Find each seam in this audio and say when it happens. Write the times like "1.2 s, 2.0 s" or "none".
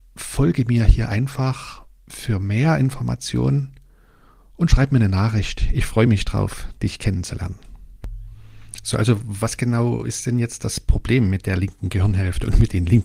none